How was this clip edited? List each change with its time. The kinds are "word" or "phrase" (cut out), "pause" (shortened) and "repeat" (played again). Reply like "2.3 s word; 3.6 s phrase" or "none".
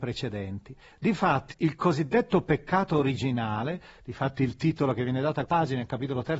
1.5 s word; 5.5 s word